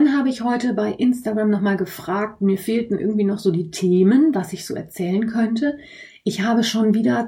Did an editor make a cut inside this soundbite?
no; 0 cuts

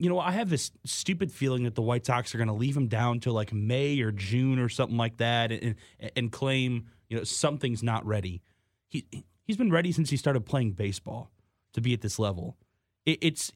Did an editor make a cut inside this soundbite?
no; 0 cuts

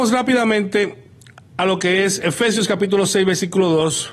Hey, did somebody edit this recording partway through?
no; 0 cuts

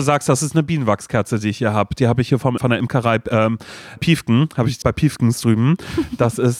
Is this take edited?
yes; 3 cuts; at 2.6 s, 4.0 s, 4.8 s

